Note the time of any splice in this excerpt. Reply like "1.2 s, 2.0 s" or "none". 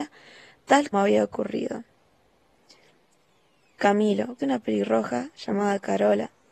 0.9 s, 4.4 s